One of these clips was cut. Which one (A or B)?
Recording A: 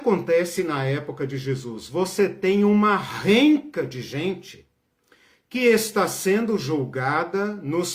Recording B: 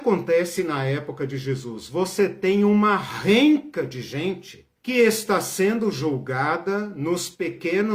B